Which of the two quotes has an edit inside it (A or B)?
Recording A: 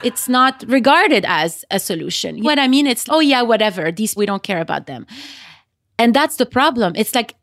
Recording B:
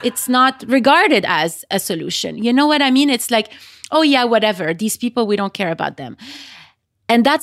A